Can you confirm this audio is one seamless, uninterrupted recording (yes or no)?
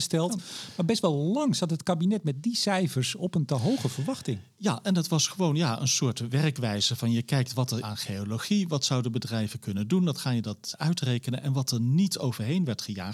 no